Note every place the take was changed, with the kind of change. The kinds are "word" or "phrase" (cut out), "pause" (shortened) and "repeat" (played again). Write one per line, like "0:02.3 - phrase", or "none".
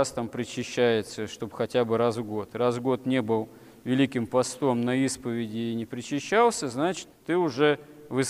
none